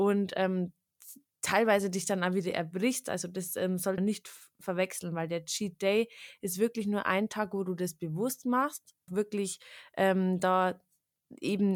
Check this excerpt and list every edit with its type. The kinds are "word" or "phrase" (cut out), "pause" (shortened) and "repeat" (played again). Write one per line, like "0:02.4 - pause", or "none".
0:04.0 - word
0:09.1 - word